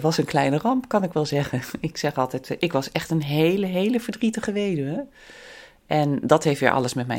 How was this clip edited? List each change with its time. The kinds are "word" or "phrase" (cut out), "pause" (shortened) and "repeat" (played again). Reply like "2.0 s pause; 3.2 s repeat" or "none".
none